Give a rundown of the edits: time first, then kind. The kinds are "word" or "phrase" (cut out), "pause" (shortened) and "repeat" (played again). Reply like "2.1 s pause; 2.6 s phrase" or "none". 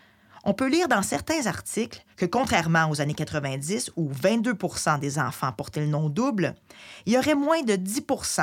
2.1 s pause